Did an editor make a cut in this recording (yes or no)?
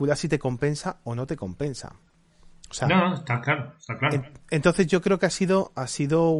no